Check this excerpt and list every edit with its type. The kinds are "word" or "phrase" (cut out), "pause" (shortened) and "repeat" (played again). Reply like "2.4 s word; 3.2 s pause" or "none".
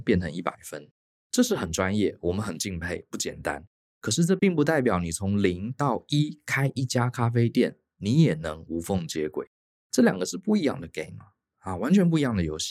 none

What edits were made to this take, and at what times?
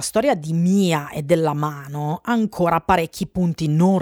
none

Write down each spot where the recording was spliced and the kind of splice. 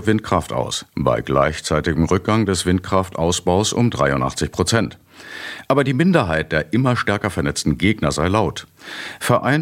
none

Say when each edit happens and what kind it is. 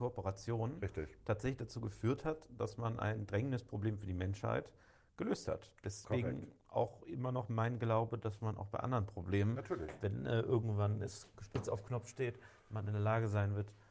none

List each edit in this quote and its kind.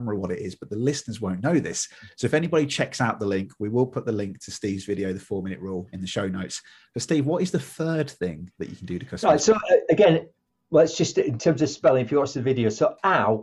none

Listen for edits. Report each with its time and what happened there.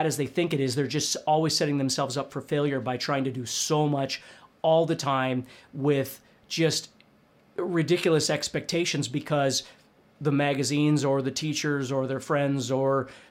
none

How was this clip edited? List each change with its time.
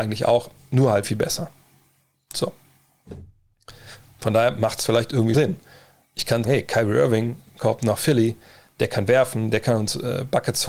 1.0 s word; 5.3 s word; 6.4 s word

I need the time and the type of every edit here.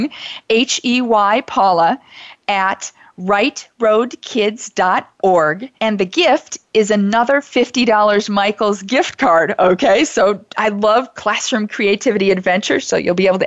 5.8 s pause

